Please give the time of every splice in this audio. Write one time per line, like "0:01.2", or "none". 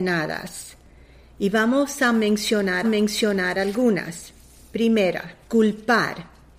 0:02.8
0:05.4

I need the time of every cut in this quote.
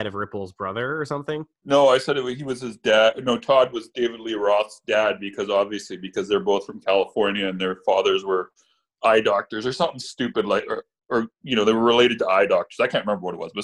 none

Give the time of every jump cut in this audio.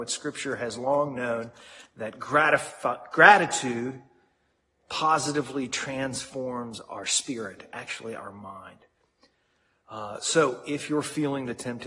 none

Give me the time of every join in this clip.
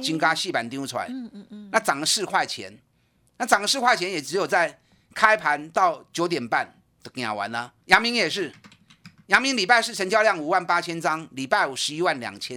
0:07.8

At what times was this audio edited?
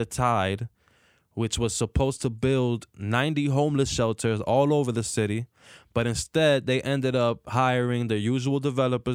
none

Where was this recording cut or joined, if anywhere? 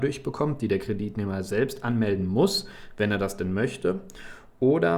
none

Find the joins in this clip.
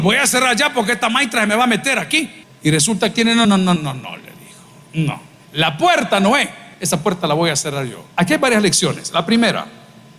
0:02.4
0:03.1
0:03.4
0:03.8
0:06.7
0:08.1

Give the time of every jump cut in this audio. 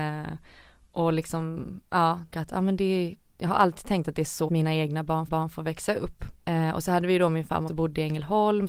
0:02.3
0:04.5
0:05.3
0:06.4
0:07.7

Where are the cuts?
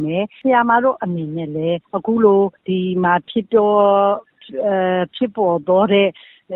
0:01.8
0:02.6

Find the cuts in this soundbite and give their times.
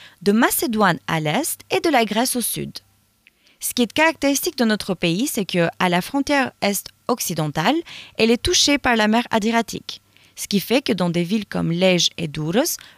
none

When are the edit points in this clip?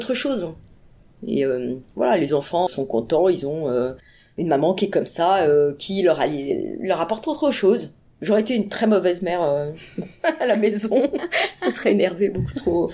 0:02.7

